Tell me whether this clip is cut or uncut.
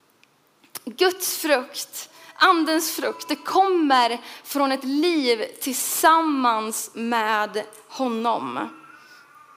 uncut